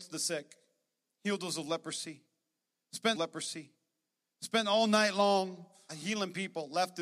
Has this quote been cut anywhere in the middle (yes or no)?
yes